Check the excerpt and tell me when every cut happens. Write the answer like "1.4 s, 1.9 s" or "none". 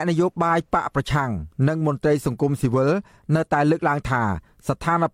none